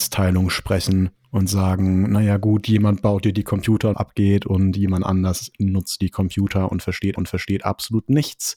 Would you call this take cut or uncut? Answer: cut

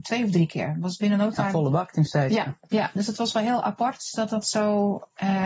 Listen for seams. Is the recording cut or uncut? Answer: cut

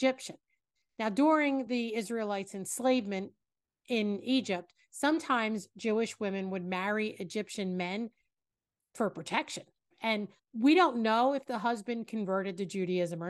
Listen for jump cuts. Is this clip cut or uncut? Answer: uncut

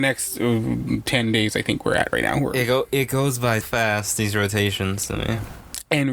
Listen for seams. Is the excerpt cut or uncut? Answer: cut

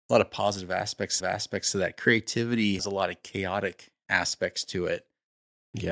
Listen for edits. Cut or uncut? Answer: cut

